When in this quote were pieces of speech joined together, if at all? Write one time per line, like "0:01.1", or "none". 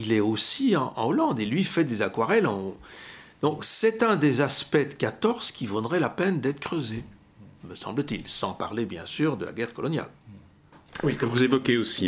none